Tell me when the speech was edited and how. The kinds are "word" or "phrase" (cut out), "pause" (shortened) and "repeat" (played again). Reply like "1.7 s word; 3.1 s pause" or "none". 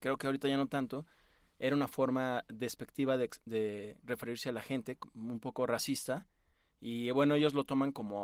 none